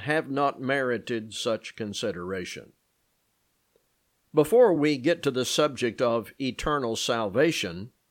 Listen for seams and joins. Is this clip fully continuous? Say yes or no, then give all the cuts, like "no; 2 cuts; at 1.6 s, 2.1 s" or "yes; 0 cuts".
yes; 0 cuts